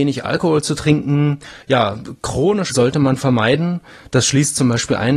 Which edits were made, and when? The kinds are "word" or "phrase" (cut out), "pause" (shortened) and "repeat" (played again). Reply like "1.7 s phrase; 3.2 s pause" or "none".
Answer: 2.7 s word